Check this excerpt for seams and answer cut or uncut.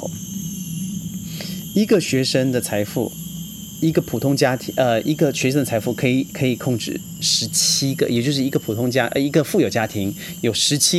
uncut